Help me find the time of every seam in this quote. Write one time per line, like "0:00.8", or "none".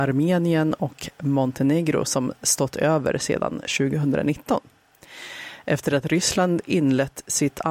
none